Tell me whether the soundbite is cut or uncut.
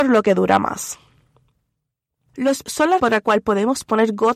cut